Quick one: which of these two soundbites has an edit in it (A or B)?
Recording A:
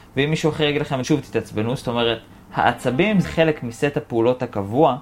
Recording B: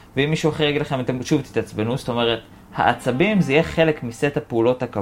A